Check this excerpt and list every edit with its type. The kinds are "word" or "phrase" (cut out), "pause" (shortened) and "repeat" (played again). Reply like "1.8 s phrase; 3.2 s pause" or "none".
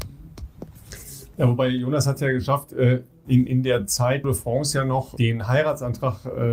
3.5 s word; 4.2 s phrase; 5.2 s word